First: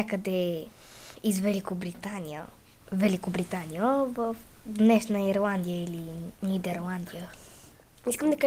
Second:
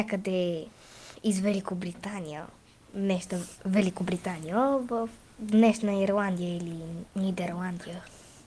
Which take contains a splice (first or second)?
first